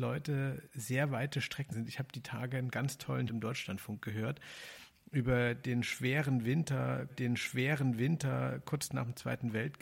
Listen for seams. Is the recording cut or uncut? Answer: cut